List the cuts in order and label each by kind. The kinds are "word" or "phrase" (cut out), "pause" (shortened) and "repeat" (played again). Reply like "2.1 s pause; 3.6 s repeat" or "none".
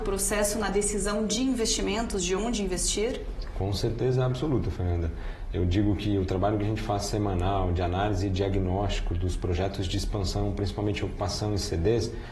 none